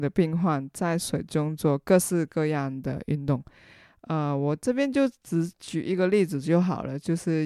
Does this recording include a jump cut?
no; 0 cuts

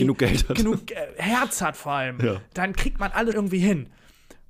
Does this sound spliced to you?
yes; 1 cut; at 3.3 s

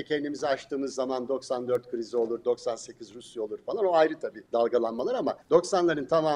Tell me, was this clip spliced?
yes; 2 cuts; at 4.4 s, 5.4 s

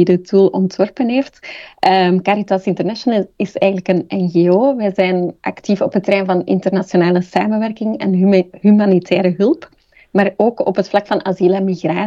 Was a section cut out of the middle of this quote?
no; 0 cuts

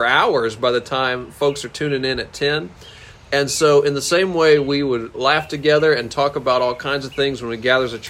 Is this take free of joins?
yes; 0 cuts

